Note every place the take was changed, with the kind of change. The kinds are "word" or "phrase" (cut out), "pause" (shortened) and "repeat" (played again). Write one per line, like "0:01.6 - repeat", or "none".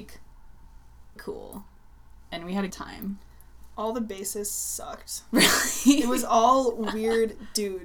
0:01.2 - word
0:02.7 - word